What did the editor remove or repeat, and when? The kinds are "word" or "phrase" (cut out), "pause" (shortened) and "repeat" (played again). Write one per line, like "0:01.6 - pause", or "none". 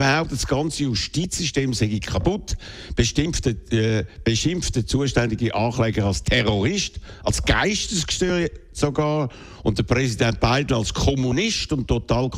none